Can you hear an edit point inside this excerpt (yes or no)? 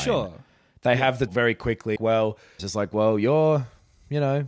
yes